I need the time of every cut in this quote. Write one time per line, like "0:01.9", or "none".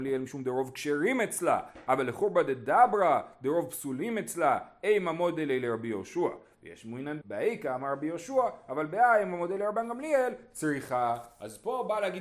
0:07.2